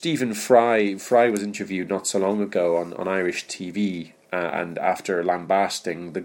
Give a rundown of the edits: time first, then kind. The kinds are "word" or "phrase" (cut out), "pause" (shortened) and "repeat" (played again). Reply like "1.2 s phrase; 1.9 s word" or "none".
none